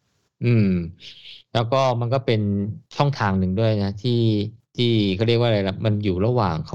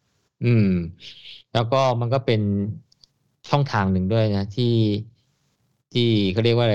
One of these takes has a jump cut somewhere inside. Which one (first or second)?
first